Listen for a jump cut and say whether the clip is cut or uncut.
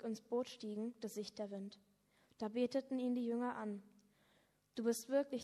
cut